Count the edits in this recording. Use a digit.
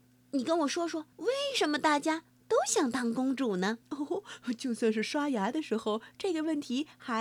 2